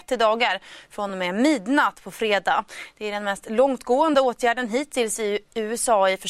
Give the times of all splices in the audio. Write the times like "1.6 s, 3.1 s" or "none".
none